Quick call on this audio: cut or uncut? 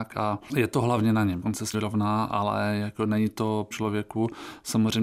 cut